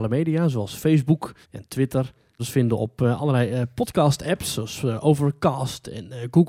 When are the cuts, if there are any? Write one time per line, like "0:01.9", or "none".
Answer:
0:01.4
0:02.4